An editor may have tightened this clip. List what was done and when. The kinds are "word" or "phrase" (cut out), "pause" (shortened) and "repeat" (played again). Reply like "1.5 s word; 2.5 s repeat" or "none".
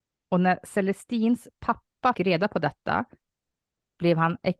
2.1 s word